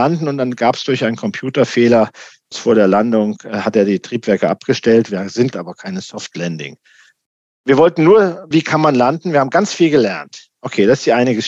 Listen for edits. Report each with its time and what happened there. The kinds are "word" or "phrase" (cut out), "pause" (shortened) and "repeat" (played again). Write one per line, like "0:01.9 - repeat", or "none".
0:02.5 - word
0:05.5 - word
0:08.5 - word